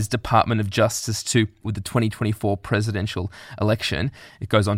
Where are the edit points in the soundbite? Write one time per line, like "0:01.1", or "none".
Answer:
0:01.6